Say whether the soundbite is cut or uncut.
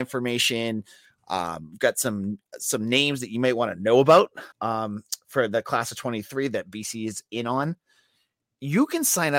cut